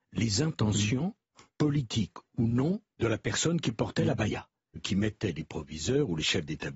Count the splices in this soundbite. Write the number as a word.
three